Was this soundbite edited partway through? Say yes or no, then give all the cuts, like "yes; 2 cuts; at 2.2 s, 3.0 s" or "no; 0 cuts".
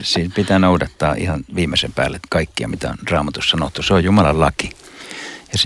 yes; 1 cut; at 2.3 s